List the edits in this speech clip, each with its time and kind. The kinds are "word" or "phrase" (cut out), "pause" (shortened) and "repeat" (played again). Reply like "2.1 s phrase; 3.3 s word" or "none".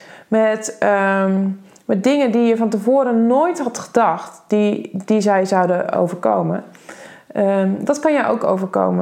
none